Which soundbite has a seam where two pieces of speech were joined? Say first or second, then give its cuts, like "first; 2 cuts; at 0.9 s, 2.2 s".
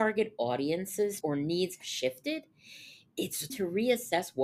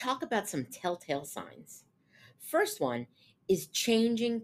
first; 3 cuts; at 1.2 s, 1.8 s, 3.5 s